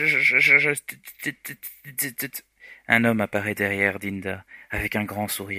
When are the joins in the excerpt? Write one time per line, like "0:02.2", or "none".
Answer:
none